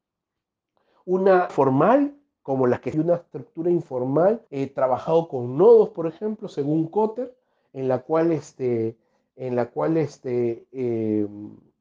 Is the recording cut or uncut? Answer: cut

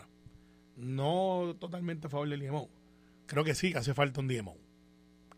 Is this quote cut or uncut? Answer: uncut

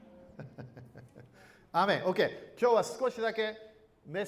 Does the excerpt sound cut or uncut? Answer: uncut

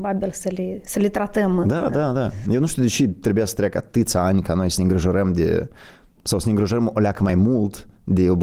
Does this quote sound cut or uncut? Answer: uncut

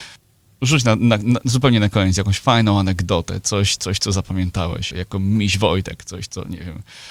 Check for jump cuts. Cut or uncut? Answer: cut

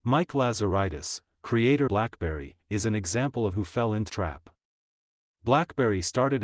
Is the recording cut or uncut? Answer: cut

